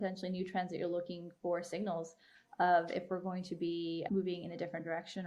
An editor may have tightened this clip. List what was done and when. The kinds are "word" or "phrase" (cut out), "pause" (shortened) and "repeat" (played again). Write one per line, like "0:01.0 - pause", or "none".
0:04.1 - word